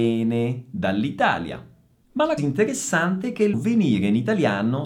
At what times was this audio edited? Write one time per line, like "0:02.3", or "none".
0:02.4
0:03.5